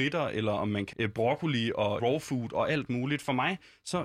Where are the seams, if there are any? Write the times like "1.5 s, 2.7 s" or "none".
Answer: 0.9 s, 2.0 s